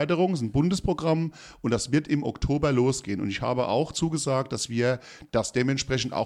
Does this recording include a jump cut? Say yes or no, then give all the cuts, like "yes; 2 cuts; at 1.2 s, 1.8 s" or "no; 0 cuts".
no; 0 cuts